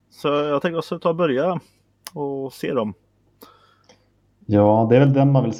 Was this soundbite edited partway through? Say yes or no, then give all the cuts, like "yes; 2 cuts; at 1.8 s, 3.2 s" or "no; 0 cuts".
no; 0 cuts